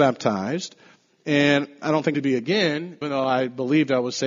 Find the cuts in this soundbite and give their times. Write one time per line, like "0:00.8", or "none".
0:02.1
0:03.0